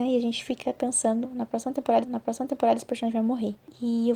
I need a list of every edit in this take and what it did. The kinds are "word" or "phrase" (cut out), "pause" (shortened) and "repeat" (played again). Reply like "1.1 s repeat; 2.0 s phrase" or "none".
2.0 s repeat

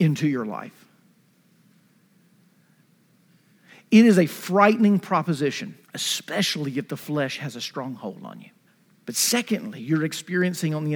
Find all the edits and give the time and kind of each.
5.8 s pause; 8.7 s pause

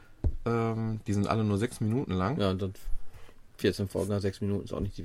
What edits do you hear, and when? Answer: none

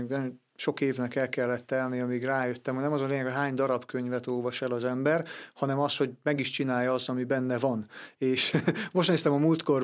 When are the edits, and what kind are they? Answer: none

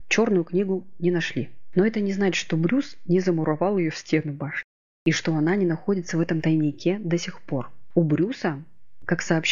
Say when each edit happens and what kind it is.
none

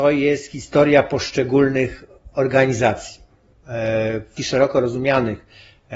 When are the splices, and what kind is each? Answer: 4.4 s word

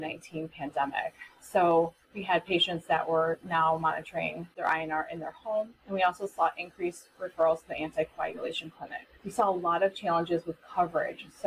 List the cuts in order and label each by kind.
2.0 s pause; 5.8 s pause; 9.2 s pause

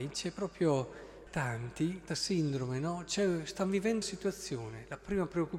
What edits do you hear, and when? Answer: 1.3 s word; 2.1 s word; 4.0 s word

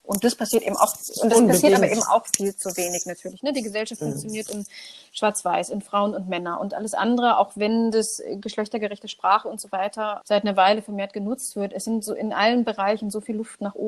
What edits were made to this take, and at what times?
10.2 s word

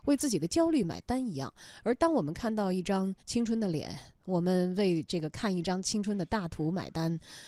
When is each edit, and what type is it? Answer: 3.2 s pause

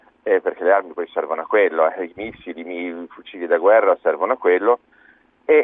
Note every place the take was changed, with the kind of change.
none

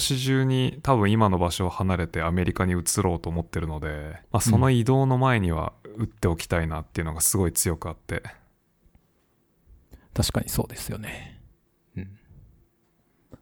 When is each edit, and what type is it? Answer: 4.2 s pause

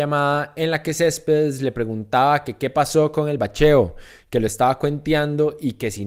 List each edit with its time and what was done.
none

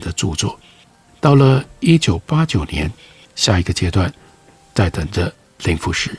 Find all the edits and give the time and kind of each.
none

